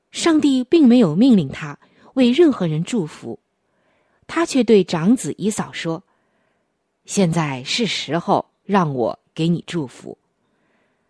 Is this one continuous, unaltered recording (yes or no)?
yes